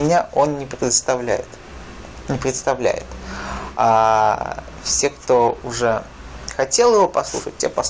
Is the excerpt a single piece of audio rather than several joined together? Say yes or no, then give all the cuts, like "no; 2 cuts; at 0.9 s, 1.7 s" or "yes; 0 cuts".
yes; 0 cuts